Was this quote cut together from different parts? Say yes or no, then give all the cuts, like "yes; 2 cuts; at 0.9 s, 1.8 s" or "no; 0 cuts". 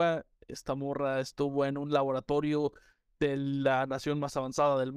no; 0 cuts